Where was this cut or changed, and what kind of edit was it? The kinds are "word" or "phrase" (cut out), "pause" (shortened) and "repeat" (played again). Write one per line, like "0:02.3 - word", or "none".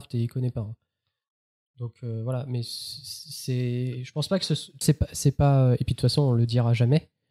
0:04.8 - word